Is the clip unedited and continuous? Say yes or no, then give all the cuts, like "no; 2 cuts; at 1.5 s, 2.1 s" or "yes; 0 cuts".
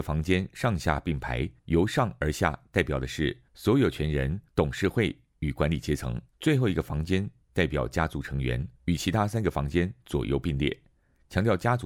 no; 5 cuts; at 1.6 s, 3.5 s, 4.5 s, 6.3 s, 8.8 s